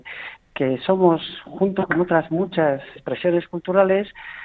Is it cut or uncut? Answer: cut